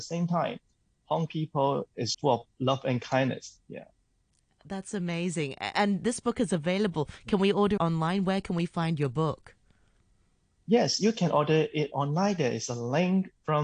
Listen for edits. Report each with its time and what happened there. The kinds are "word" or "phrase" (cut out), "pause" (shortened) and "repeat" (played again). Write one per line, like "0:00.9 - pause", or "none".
0:01.3 - word
0:02.1 - word
0:07.8 - word